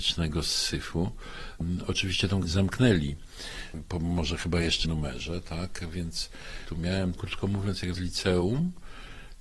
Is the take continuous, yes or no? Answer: no